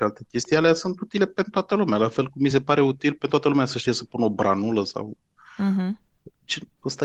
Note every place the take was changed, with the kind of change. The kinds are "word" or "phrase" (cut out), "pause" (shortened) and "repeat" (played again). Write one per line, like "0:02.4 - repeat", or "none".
none